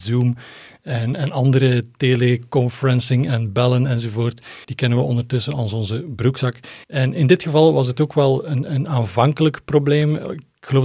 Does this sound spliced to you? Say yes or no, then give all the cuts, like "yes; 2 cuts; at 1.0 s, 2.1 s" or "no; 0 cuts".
yes; 2 cuts; at 4.6 s, 6.8 s